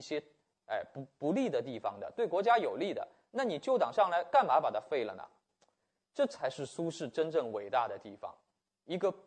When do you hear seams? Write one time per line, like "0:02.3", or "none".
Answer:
none